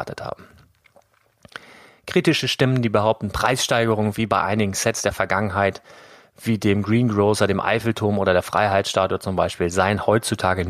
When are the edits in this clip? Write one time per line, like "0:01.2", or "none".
none

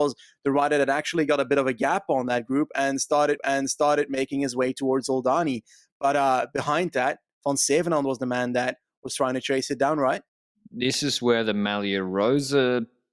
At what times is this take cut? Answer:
0:03.4

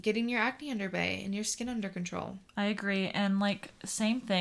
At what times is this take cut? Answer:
0:02.5

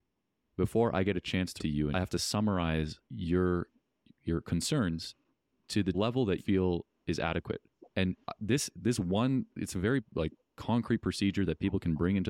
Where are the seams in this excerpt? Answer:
0:01.6
0:01.9
0:03.1
0:05.3
0:05.9
0:06.4
0:07.9

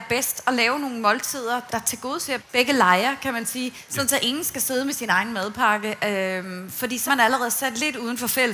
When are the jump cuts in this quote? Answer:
0:01.7
0:02.4
0:07.1

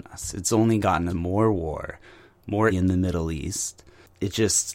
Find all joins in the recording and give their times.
0:01.1
0:02.7

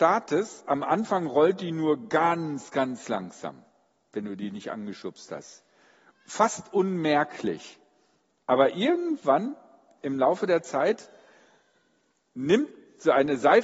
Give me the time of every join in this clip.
none

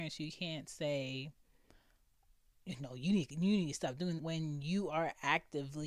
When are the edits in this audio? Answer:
0:04.2

